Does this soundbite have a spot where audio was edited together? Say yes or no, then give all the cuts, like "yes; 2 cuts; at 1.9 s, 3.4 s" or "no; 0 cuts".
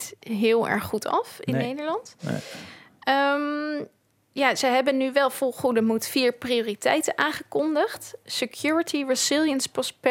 no; 0 cuts